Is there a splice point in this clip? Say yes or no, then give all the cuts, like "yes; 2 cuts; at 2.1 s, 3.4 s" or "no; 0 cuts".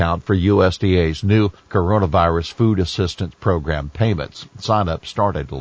yes; 1 cut; at 1.6 s